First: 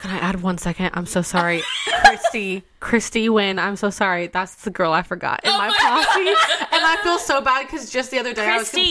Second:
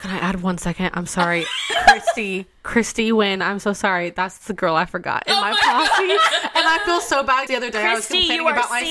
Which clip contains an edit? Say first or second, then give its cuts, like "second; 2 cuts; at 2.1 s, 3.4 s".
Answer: second; 2 cuts; at 1.1 s, 7.5 s